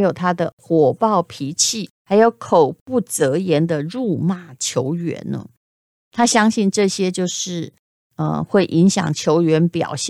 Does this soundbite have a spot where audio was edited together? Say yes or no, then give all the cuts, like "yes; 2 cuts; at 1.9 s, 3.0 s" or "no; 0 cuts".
yes; 1 cut; at 1.9 s